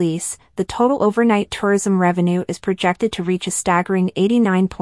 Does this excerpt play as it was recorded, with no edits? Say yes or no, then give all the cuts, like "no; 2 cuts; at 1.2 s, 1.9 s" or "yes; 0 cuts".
yes; 0 cuts